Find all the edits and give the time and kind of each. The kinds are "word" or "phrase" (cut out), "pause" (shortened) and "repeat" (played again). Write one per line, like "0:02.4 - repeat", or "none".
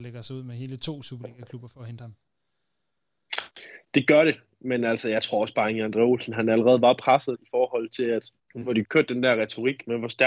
0:07.3 - word
0:08.4 - pause
0:08.8 - word

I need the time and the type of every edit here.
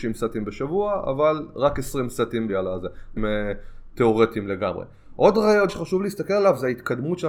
0:02.5 - phrase
0:03.2 - phrase
0:05.7 - word

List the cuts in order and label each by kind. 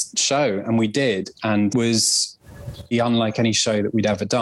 0:01.7 - phrase
0:02.9 - word

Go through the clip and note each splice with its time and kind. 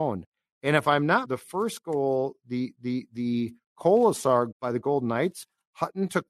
0:01.2 - phrase
0:02.7 - repeat
0:04.5 - word

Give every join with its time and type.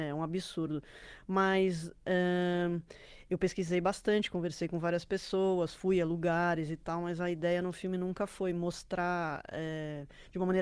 none

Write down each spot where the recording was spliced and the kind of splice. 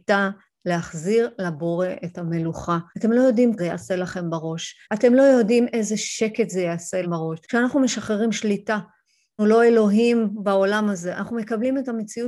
0:02.9 - pause
0:03.6 - phrase
0:04.8 - pause
0:07.0 - word
0:07.4 - pause
0:09.4 - word

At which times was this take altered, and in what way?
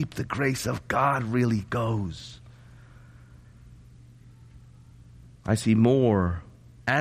none

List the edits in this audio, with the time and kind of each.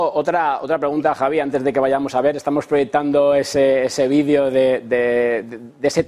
none

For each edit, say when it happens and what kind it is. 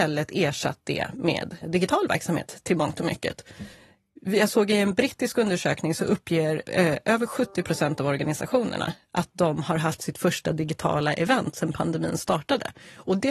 0:01.6 - word

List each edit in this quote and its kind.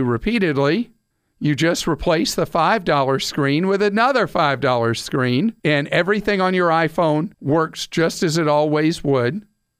0:01.1 - pause
0:05.6 - pause
0:07.3 - pause

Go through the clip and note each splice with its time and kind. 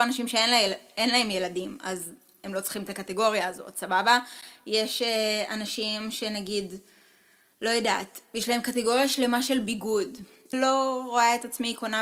0:10.5 - word

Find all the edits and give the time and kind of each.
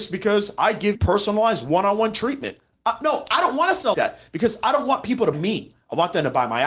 0:00.9 - word
0:03.9 - word
0:05.3 - word

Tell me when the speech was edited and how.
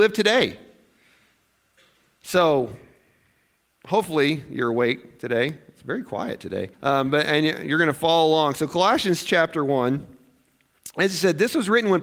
0:06.7 - pause

